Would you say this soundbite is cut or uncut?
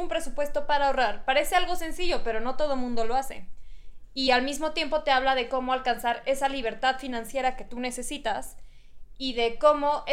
uncut